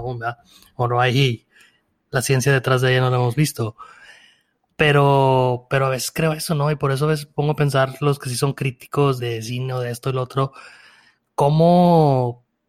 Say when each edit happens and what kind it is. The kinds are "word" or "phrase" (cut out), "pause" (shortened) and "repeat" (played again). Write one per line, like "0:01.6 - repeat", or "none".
0:09.2 - word